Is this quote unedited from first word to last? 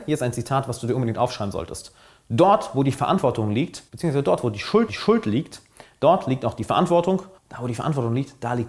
no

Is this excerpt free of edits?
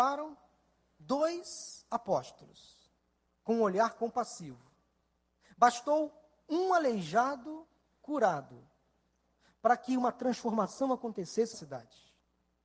no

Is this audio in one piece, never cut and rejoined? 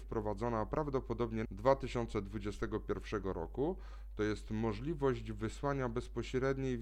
no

